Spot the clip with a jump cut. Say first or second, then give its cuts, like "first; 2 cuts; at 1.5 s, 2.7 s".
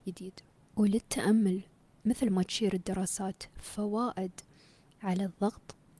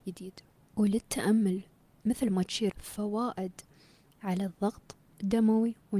second; 1 cut; at 2.7 s